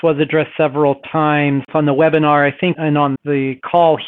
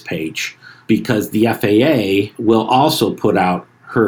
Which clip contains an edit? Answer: first; 3 cuts; at 1.7 s, 2.7 s, 3.2 s

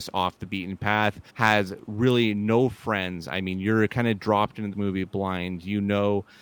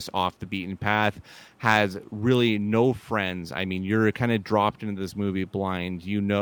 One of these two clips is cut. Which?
first; 2 cuts; at 1.3 s, 4.7 s

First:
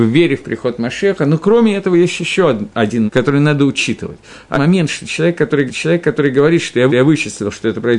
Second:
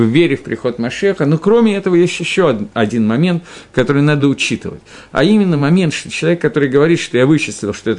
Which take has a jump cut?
first; 4 cuts; at 3.1 s, 4.5 s, 5.7 s, 6.9 s

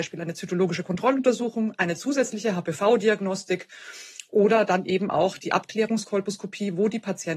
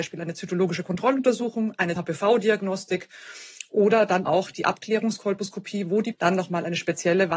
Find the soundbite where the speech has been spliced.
second; 3 cuts; at 2.0 s, 4.3 s, 6.1 s

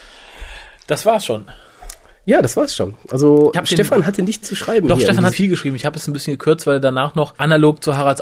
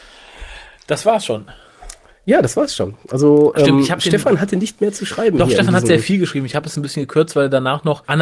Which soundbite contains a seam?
first; 3 cuts; at 3.5 s, 4.4 s, 5.3 s

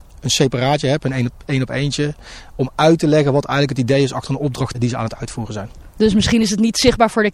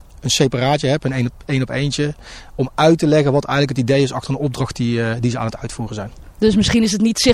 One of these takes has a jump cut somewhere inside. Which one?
first; 1 cut; at 4.7 s

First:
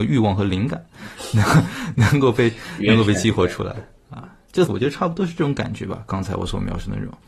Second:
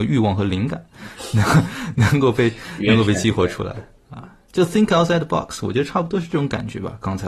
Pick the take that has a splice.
first; 1 cut; at 4.7 s

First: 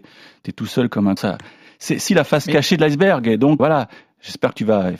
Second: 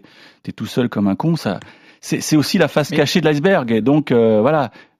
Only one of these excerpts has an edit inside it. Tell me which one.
first; 3 cuts; at 1.2 s, 2.1 s, 3.6 s

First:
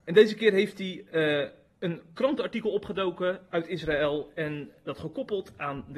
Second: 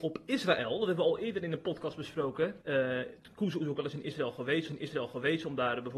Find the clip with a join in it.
second; 2 cuts; at 2.6 s, 4.7 s

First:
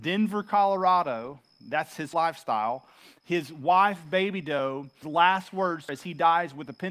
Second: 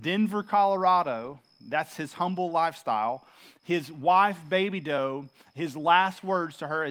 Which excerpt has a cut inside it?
first; 3 cuts; at 2.1 s, 5.0 s, 5.9 s

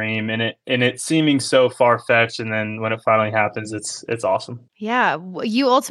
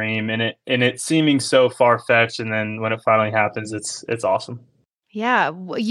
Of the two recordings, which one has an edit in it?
first; 1 cut; at 4.7 s

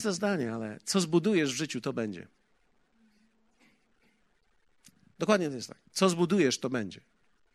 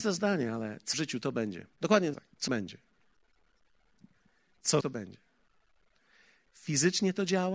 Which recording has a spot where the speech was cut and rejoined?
second; 5 cuts; at 0.9 s, 1.7 s, 2.1 s, 2.5 s, 4.8 s

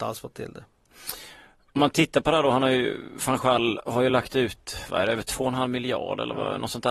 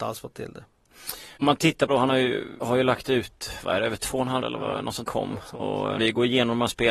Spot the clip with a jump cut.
second; 6 cuts; at 1.4 s, 1.9 s, 2.6 s, 4.4 s, 5.0 s, 6.0 s

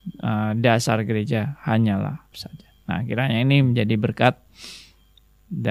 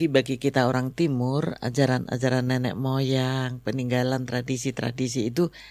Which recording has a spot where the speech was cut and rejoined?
first; 1 cut; at 2.3 s

